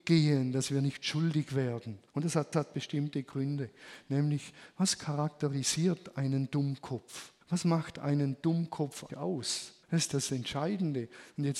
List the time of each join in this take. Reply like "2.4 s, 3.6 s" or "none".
2.1 s, 2.5 s, 7.4 s, 9.1 s, 9.8 s